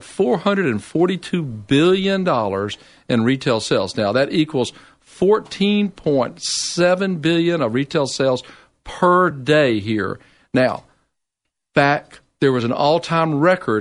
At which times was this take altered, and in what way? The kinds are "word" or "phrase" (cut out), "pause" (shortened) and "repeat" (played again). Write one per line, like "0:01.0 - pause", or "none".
none

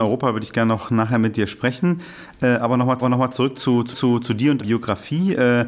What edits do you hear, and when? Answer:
0:03.0 - repeat
0:03.9 - repeat
0:04.6 - word

